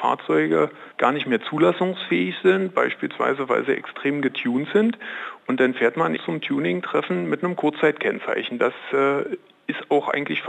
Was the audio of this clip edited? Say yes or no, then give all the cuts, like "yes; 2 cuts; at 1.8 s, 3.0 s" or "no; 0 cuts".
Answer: yes; 2 cuts; at 0.9 s, 6.2 s